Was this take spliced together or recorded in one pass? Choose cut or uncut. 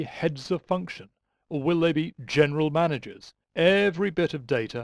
cut